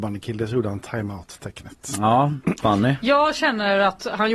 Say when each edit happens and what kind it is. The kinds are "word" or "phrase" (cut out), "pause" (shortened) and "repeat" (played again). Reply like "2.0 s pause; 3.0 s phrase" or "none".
2.6 s word